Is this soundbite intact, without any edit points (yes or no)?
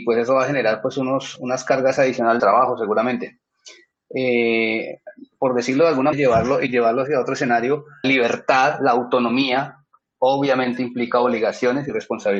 no